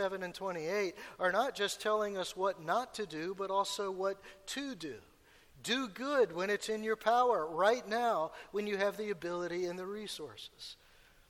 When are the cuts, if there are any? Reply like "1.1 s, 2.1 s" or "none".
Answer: none